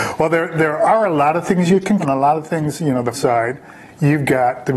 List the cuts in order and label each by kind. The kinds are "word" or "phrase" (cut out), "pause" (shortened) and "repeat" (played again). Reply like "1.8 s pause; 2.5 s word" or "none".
2.0 s word; 3.1 s word